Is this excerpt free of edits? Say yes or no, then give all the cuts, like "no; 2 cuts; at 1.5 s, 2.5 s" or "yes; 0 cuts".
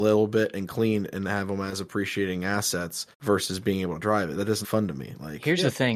no; 2 cuts; at 3.1 s, 4.6 s